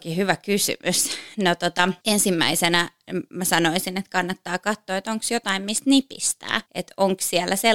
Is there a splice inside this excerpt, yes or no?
yes